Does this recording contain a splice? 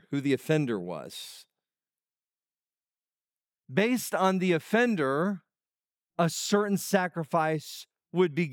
no; 0 cuts

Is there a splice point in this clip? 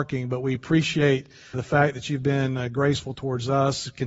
yes; 1 cut; at 1.5 s

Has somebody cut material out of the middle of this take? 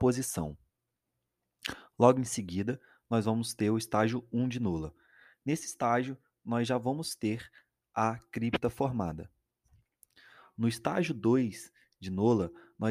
no; 0 cuts

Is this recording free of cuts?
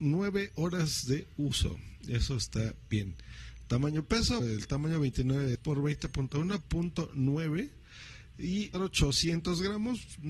no; 4 cuts; at 4.4 s, 5.5 s, 6.6 s, 8.7 s

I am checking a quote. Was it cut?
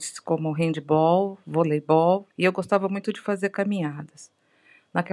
yes; 1 cut; at 2.3 s

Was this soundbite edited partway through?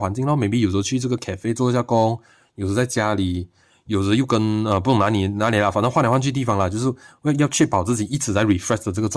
no; 0 cuts

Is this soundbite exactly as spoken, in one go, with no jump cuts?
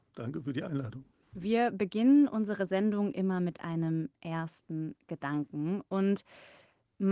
no; 1 cut; at 1.2 s

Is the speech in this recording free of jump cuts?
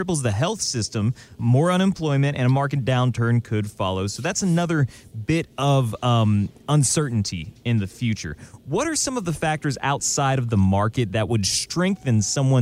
yes; 0 cuts

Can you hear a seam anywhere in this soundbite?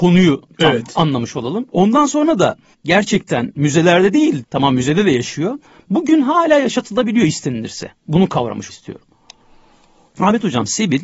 yes; 3 cuts; at 2.7 s, 4.4 s, 8.7 s

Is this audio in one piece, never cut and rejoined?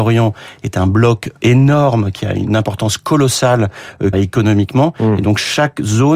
no; 2 cuts; at 1.4 s, 4.1 s

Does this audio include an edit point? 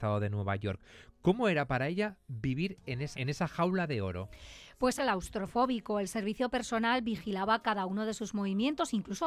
yes; 2 cuts; at 3.1 s, 5.0 s

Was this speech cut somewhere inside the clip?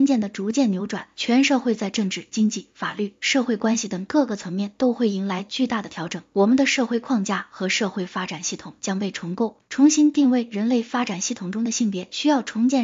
no; 0 cuts

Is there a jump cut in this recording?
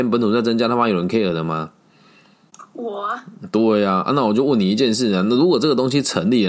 no; 0 cuts

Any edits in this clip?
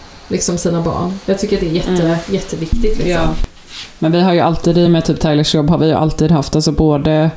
no; 0 cuts

